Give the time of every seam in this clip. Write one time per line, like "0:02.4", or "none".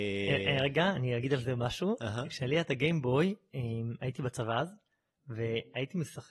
none